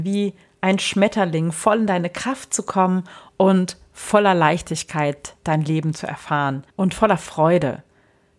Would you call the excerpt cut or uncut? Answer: cut